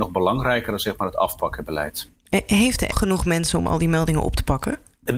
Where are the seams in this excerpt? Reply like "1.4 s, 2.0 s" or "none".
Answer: 2.9 s